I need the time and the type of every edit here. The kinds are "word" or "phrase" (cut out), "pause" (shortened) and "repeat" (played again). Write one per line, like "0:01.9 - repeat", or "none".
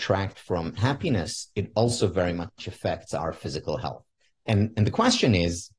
none

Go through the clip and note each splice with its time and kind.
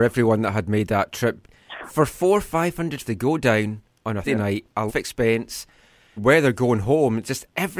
0:01.4 - word
0:01.9 - word
0:03.0 - word
0:04.2 - word
0:04.9 - word
0:06.2 - word

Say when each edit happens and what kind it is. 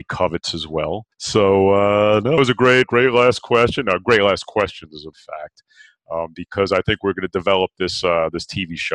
0:01.1 - pause
0:02.4 - phrase
0:02.8 - word
0:05.1 - phrase

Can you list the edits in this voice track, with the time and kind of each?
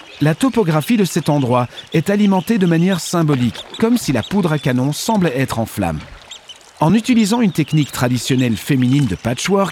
none

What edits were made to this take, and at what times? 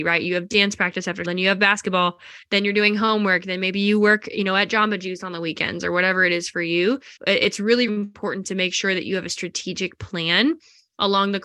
0:01.2 - word
0:07.2 - pause
0:07.9 - word

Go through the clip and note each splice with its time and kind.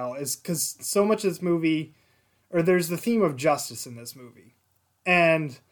none

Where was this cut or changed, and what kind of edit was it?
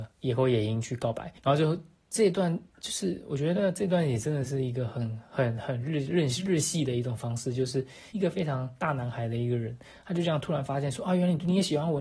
0:01.4 - pause
0:02.7 - pause

